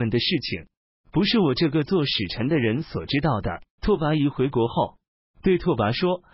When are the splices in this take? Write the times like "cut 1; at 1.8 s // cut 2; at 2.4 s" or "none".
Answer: cut 1; at 3.8 s